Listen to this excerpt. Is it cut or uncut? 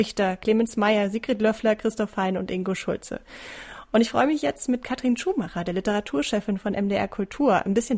uncut